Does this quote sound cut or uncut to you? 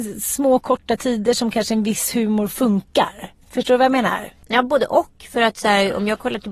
cut